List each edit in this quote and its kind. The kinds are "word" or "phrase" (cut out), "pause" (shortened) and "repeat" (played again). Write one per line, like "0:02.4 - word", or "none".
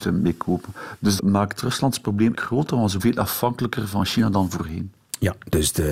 0:01.2 - word
0:02.3 - word
0:03.0 - word